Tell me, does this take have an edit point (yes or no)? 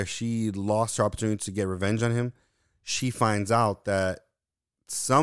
no